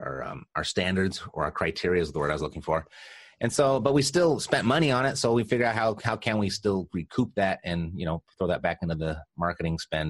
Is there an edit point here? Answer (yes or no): no